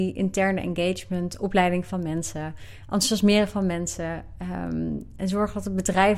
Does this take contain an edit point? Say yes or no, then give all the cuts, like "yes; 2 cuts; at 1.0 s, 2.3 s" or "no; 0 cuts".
no; 0 cuts